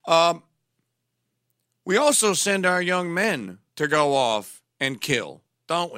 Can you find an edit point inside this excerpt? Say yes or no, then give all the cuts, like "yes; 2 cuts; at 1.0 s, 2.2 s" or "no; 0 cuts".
yes; 2 cuts; at 3.7 s, 4.7 s